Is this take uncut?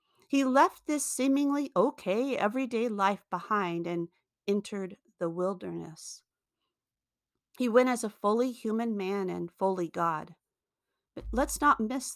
yes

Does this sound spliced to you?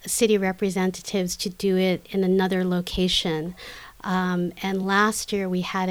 no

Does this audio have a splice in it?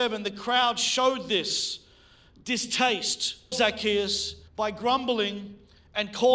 yes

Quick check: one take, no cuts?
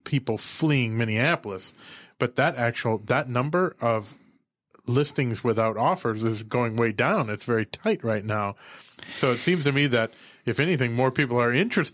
yes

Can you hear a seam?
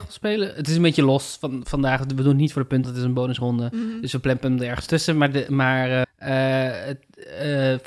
yes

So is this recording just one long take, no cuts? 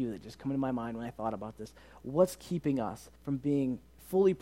no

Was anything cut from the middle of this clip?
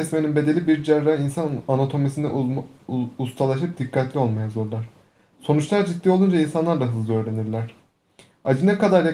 no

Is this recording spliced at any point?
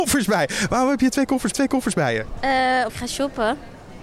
yes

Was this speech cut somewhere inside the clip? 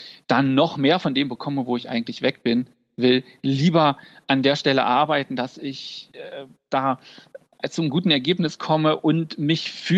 no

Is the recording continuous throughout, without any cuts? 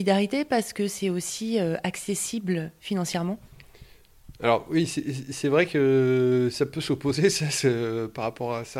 yes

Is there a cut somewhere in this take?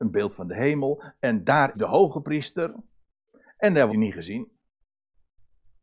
yes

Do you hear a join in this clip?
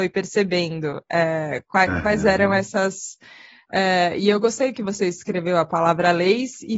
no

